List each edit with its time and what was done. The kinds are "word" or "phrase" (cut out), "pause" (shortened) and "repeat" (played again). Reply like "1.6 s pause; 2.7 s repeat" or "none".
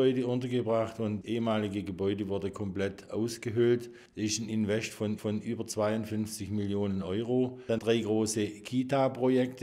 1.2 s word; 4.1 s pause; 5.2 s repeat; 7.8 s phrase